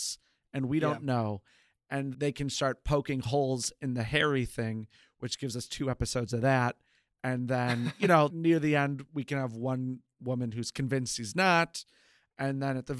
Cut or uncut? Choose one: cut